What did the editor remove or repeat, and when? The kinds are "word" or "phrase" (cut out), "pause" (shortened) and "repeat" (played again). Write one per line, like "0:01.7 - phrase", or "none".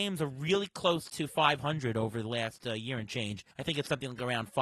0:03.5 - pause